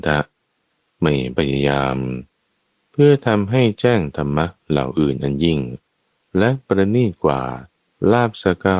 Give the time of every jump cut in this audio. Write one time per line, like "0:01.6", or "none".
none

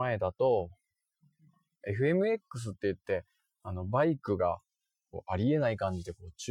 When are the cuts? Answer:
none

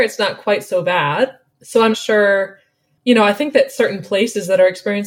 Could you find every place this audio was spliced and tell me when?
0:01.9

